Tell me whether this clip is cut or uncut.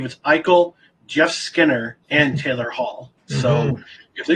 cut